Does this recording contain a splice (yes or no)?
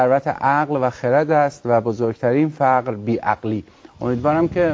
no